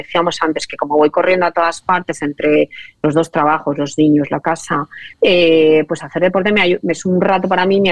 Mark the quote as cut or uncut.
cut